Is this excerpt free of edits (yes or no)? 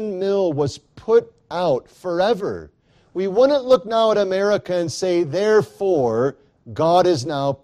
yes